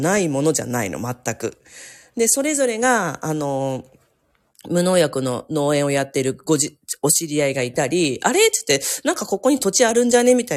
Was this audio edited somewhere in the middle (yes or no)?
no